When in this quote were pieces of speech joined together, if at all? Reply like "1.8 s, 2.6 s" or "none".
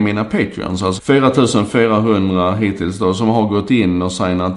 1.0 s